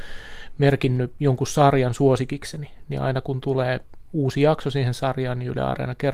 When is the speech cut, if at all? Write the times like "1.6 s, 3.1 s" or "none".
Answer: none